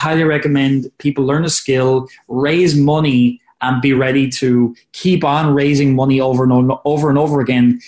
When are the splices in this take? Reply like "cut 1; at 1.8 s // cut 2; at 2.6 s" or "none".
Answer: none